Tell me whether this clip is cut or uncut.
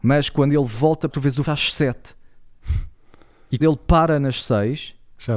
cut